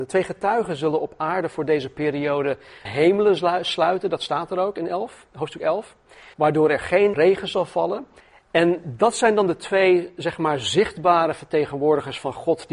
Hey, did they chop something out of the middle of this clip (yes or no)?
yes